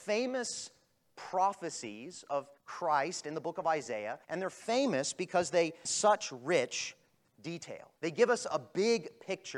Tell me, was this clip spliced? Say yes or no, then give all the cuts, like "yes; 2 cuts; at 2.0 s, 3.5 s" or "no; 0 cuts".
yes; 4 cuts; at 2.6 s, 4.2 s, 5.8 s, 8.0 s